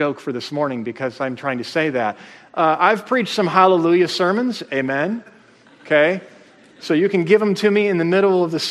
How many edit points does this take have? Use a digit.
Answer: 0